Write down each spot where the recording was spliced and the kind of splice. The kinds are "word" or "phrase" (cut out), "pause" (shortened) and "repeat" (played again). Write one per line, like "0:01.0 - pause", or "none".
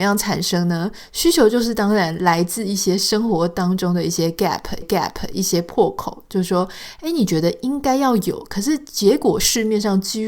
0:04.8 - repeat